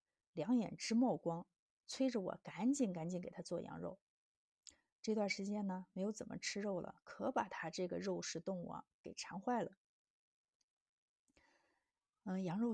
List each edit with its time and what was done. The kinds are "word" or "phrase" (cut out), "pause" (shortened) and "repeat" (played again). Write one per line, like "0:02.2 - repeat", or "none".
none